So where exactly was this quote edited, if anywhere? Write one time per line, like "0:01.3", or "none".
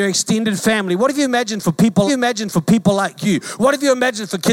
0:02.1